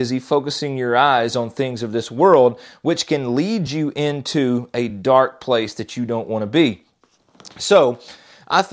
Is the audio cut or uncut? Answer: uncut